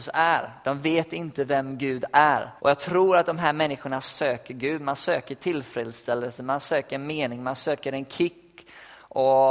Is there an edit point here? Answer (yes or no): yes